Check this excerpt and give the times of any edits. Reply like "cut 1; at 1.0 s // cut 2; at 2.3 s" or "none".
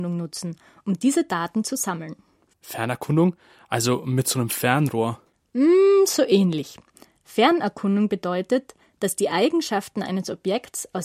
none